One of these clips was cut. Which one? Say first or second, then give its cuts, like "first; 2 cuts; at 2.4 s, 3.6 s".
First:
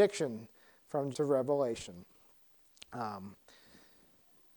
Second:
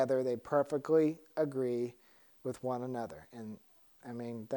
first; 1 cut; at 1.1 s